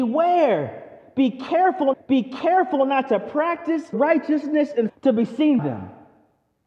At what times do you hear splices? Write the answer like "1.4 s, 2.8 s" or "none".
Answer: 1.9 s, 3.9 s, 4.9 s, 5.6 s